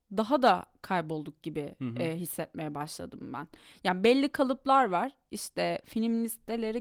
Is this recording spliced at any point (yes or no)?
no